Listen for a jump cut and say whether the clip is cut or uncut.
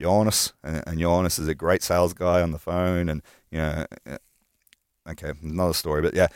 uncut